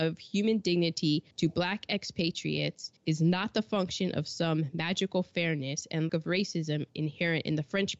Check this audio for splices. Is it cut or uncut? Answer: cut